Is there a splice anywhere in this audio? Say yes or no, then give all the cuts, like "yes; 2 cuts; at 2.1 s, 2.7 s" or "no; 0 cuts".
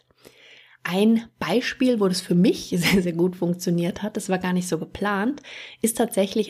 no; 0 cuts